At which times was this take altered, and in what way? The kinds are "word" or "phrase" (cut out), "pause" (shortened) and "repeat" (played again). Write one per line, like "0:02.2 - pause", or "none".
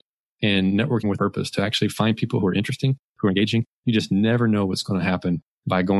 none